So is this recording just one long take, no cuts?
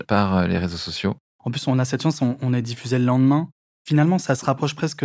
yes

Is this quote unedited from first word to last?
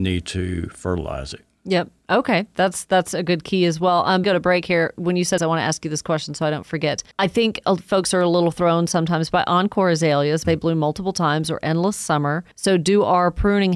no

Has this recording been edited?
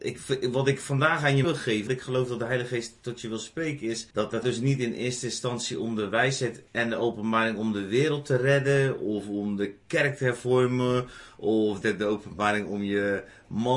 yes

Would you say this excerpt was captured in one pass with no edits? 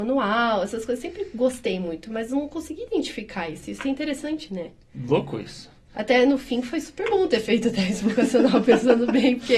yes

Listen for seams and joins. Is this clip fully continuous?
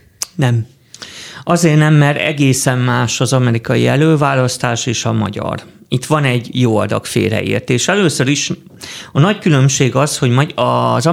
yes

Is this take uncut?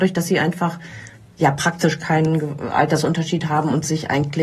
yes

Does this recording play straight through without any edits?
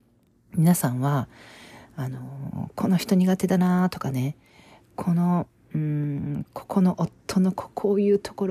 yes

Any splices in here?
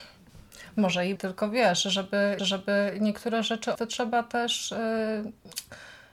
yes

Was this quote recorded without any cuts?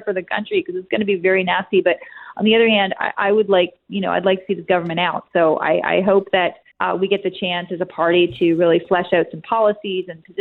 no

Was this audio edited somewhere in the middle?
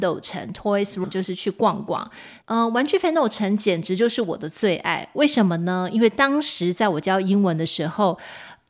yes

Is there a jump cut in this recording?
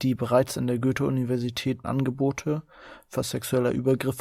yes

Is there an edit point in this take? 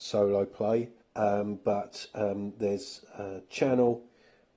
yes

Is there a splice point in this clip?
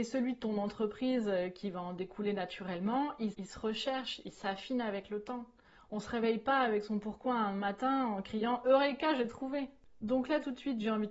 yes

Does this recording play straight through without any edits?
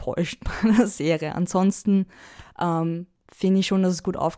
yes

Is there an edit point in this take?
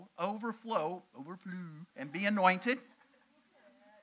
yes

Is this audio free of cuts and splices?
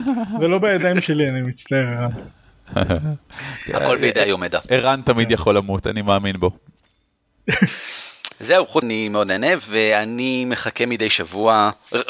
no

